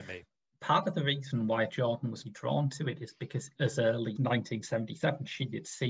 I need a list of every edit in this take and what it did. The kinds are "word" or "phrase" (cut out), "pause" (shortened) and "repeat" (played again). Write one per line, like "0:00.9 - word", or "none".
0:01.7 - word
0:02.2 - word
0:03.6 - word
0:04.2 - word